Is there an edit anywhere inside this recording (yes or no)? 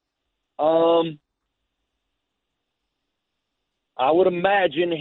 no